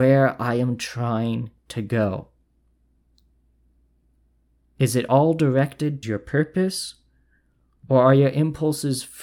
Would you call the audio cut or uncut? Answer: cut